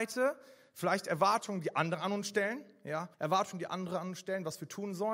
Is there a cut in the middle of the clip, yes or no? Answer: yes